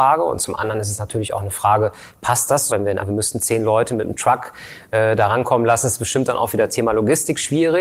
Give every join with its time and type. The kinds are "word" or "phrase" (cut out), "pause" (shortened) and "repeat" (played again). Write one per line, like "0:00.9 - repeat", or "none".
0:02.7 - word
0:03.0 - phrase